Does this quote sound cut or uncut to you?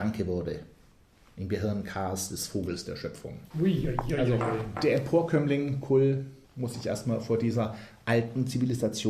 cut